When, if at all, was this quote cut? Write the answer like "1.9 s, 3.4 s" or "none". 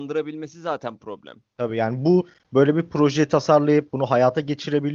none